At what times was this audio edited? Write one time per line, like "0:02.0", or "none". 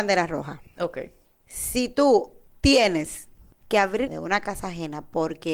0:04.1

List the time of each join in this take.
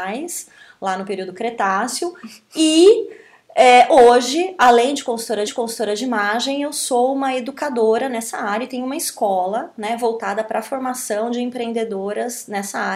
0:05.5

